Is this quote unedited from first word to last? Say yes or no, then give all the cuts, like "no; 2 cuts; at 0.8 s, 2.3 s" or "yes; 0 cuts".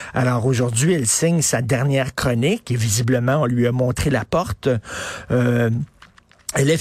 yes; 0 cuts